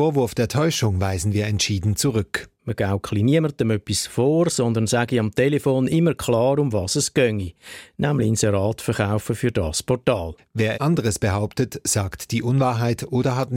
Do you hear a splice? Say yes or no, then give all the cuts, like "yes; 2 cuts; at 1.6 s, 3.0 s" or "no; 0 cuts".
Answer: yes; 1 cut; at 10.7 s